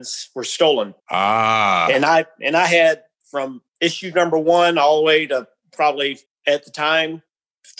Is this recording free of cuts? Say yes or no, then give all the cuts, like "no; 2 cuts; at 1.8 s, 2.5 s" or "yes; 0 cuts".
no; 3 cuts; at 1.0 s, 3.7 s, 6.3 s